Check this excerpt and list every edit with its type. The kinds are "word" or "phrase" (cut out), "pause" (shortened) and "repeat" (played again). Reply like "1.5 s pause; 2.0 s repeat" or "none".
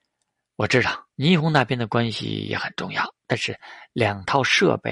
1.1 s pause